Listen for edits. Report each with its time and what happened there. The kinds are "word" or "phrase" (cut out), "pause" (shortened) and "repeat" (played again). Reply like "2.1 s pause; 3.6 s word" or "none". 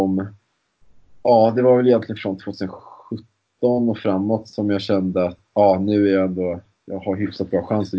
5.5 s word